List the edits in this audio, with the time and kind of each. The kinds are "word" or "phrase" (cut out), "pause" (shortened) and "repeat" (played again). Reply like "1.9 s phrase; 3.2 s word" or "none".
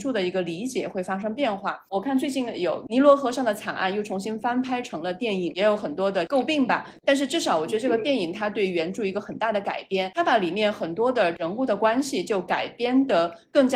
5.5 s word